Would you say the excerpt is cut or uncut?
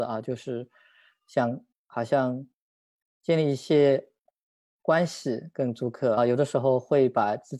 cut